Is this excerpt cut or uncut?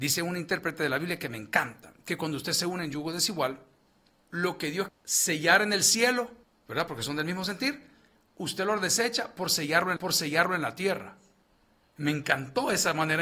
cut